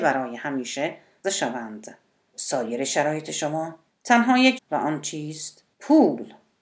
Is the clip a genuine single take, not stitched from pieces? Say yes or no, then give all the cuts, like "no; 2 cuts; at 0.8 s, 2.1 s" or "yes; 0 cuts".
no; 5 cuts; at 1.2 s, 2.3 s, 3.9 s, 4.6 s, 5.7 s